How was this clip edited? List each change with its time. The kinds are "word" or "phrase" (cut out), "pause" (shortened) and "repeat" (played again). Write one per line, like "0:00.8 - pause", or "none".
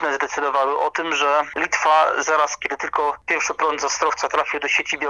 none